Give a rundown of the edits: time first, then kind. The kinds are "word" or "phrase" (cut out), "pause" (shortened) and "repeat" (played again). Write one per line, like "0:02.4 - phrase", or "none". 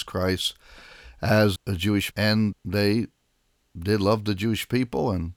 0:01.6 - word
0:02.1 - word
0:02.5 - word